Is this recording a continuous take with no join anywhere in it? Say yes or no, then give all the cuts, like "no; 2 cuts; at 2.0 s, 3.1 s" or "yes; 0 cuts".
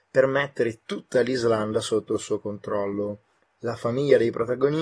yes; 0 cuts